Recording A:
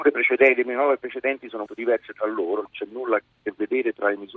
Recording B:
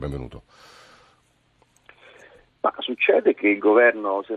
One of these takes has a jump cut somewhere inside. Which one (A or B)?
A